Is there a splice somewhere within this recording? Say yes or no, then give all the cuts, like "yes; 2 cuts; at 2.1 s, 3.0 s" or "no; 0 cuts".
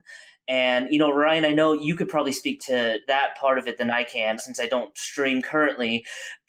yes; 3 cuts; at 2.6 s, 3.0 s, 4.4 s